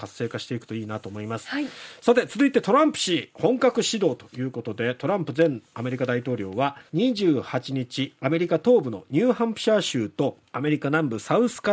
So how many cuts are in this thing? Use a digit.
3